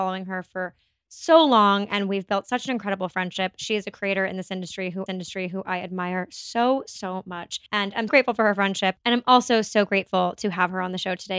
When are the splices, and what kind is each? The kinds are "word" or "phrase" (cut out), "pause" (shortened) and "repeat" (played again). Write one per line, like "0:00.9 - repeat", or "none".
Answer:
0:05.1 - repeat
0:07.7 - pause
0:08.1 - word